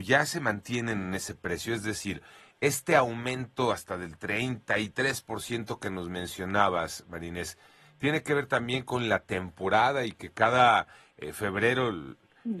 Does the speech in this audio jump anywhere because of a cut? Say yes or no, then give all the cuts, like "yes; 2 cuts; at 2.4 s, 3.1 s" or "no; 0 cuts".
no; 0 cuts